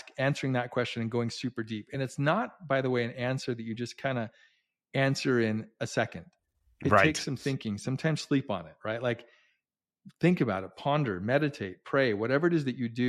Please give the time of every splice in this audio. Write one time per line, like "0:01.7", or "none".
none